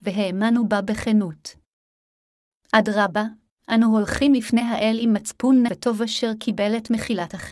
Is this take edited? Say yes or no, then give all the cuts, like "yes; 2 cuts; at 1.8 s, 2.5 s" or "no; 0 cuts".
yes; 1 cut; at 5.7 s